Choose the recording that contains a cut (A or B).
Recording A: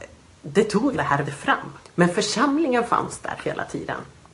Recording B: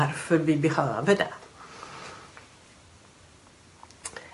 A